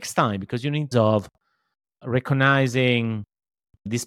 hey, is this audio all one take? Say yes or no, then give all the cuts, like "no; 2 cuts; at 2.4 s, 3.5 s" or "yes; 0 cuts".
no; 1 cut; at 0.9 s